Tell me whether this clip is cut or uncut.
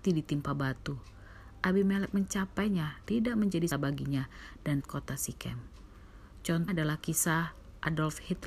cut